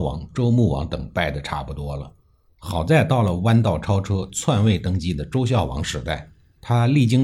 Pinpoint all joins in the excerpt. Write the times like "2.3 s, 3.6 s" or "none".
none